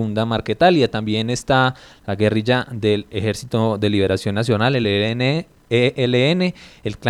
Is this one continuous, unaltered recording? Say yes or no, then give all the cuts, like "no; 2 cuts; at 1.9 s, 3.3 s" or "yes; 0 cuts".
yes; 0 cuts